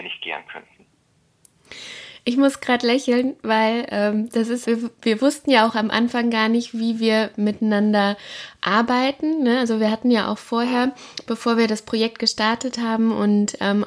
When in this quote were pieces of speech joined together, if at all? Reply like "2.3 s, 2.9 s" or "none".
4.6 s